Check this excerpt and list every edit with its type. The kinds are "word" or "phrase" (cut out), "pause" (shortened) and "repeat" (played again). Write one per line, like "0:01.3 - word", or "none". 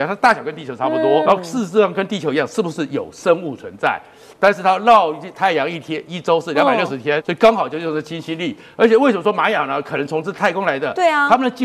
0:01.2 - word
0:07.2 - word